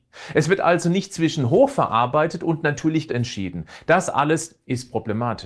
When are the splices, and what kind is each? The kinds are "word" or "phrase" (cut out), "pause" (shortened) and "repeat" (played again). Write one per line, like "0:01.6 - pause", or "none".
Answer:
0:03.1 - word